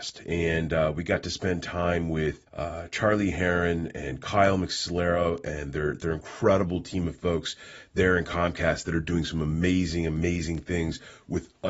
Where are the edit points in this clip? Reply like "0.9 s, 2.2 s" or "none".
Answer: 2.5 s